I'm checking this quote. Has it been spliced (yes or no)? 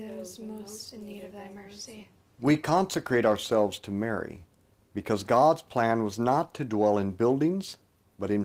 no